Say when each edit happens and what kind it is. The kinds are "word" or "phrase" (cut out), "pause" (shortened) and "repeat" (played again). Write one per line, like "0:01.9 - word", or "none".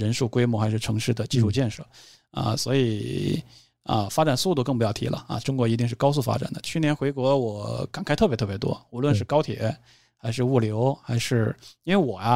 none